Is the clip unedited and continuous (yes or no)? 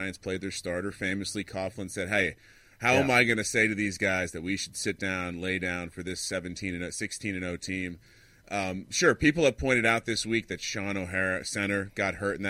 yes